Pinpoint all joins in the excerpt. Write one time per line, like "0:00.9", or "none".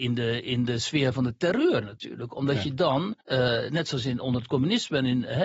0:03.2